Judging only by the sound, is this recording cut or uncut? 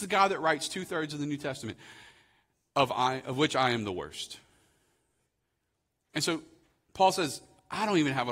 uncut